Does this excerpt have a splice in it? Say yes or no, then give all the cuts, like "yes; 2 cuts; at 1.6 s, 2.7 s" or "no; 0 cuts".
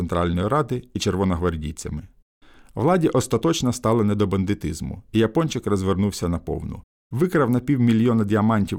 no; 0 cuts